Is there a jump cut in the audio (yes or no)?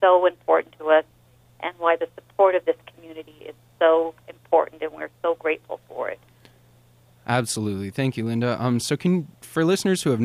no